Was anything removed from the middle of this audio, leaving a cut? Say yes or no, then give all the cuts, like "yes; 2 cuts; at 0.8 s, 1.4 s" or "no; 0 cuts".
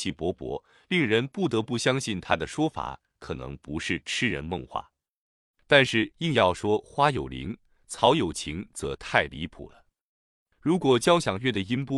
no; 0 cuts